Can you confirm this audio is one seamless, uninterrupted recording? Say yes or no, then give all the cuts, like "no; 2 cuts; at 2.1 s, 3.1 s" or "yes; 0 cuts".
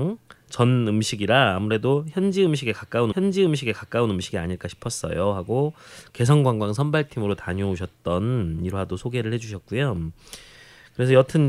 no; 1 cut; at 3.1 s